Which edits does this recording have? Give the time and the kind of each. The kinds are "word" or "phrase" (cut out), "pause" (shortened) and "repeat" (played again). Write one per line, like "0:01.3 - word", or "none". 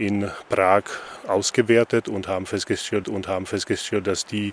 0:03.0 - repeat